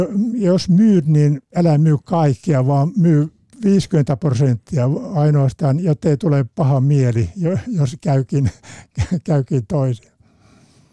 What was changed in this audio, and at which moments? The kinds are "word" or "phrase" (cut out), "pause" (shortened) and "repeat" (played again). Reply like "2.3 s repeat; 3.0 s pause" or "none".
none